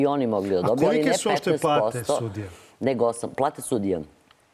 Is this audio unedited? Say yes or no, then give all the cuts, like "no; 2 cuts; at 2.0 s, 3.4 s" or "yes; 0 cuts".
yes; 0 cuts